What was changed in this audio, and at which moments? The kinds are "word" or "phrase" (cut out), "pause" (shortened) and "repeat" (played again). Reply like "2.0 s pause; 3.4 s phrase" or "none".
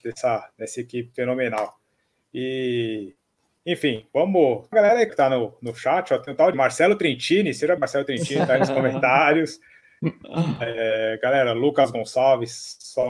4.7 s word; 5.1 s word; 6.5 s word; 7.8 s word